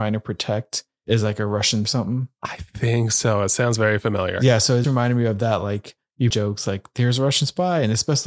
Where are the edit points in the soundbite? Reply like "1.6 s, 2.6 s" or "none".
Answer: 1.9 s, 4.8 s, 6.3 s